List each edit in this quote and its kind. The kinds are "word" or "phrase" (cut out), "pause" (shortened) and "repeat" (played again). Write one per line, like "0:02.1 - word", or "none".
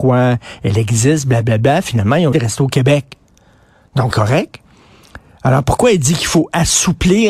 0:02.3 - word
0:04.1 - word